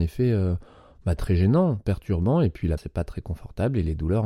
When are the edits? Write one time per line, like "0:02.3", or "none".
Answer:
0:02.8